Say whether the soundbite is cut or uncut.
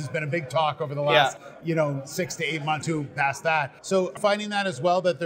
cut